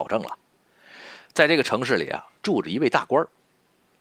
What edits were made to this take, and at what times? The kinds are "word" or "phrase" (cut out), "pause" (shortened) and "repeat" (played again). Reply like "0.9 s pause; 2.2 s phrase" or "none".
2.4 s pause